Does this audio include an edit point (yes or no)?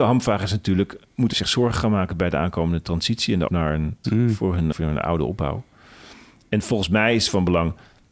yes